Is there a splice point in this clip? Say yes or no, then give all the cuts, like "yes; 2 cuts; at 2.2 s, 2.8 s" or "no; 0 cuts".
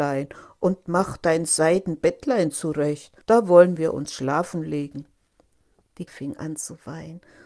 yes; 2 cuts; at 3.2 s, 6.1 s